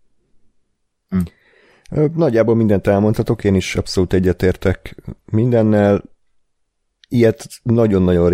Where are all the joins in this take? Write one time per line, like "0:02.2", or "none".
none